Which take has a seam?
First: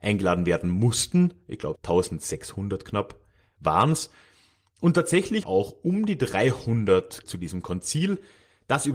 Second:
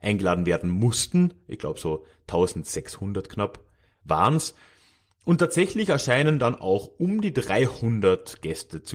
first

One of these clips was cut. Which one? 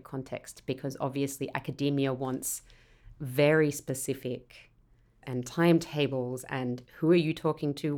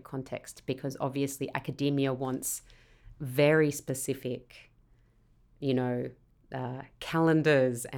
first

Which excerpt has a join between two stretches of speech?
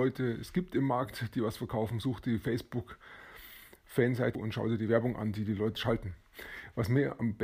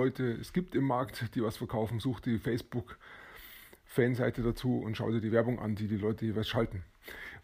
first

